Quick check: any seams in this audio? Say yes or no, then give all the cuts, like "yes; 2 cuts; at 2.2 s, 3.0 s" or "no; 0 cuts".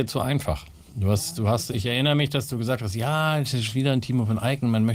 no; 0 cuts